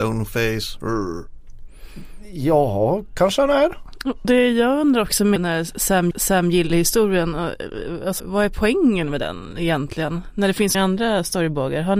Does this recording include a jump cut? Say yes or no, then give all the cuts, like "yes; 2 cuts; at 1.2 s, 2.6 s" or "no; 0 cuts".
yes; 5 cuts; at 4.2 s, 5.4 s, 6.1 s, 8.2 s, 10.7 s